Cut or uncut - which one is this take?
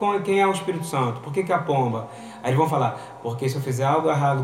uncut